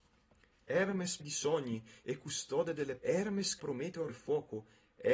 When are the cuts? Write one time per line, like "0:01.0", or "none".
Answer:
0:01.2
0:03.0
0:03.6
0:04.1